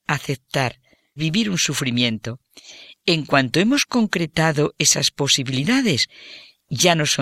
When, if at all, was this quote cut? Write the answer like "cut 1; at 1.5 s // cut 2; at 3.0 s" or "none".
cut 1; at 1.2 s